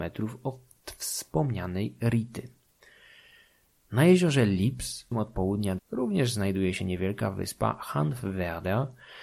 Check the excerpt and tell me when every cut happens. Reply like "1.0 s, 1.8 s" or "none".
5.1 s, 5.8 s